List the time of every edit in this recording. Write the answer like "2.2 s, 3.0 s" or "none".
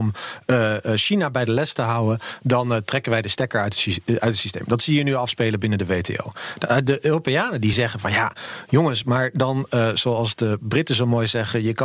none